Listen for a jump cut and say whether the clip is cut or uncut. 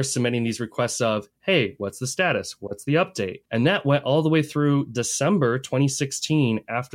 cut